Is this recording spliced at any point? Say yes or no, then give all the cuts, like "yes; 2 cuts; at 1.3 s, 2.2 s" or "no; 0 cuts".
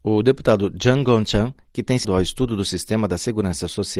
yes; 1 cut; at 2.0 s